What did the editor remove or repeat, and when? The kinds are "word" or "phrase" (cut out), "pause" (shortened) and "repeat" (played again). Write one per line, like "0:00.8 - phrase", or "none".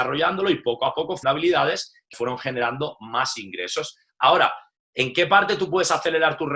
0:01.2 - word
0:02.1 - word